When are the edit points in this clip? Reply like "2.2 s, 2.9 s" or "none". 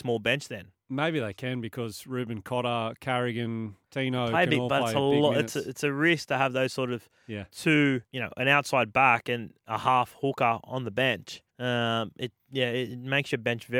3.8 s, 8.1 s, 11.5 s